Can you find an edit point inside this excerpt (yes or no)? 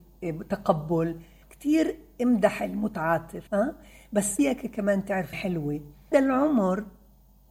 yes